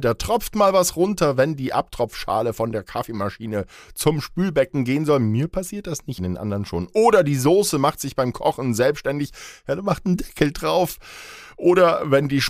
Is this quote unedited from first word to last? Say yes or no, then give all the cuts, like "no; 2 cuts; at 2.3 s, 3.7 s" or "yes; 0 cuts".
no; 1 cut; at 6.2 s